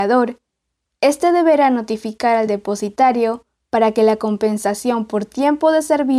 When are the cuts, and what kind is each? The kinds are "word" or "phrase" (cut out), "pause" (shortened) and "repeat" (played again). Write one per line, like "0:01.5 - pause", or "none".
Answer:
none